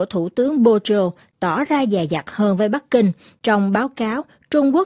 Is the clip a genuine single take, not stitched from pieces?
yes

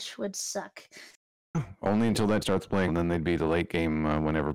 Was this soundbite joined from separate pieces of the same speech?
yes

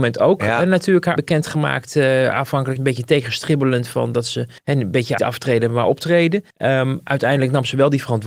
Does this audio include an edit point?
yes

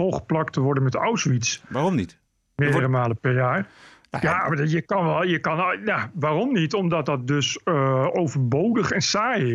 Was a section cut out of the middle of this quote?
no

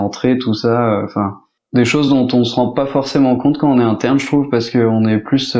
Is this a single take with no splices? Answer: yes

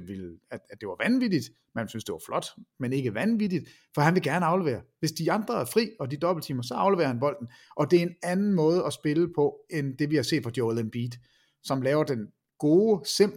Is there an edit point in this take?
no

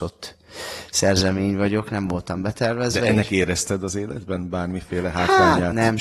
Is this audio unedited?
yes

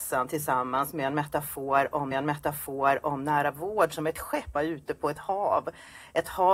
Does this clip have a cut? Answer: yes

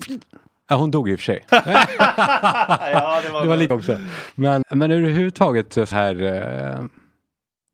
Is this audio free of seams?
no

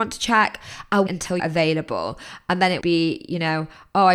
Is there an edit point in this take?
yes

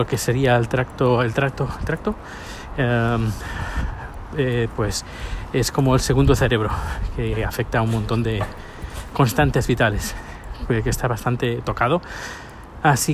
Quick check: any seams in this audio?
no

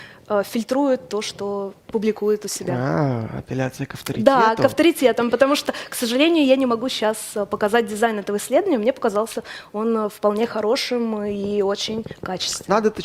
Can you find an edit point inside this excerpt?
yes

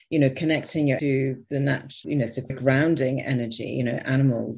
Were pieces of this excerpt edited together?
yes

